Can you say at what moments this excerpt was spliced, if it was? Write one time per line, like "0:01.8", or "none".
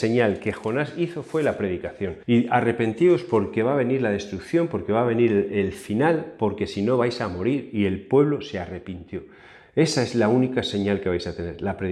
0:02.2